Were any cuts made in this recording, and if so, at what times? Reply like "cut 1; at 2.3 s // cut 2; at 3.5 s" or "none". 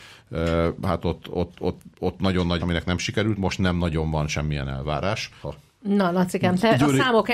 cut 1; at 1.2 s // cut 2; at 2.6 s // cut 3; at 3.4 s // cut 4; at 5.4 s